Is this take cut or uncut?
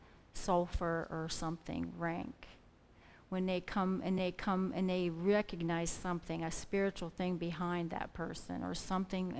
cut